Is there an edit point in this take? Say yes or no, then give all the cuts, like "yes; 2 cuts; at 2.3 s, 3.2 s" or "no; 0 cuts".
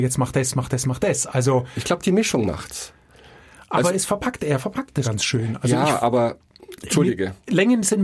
yes; 1 cut; at 5.0 s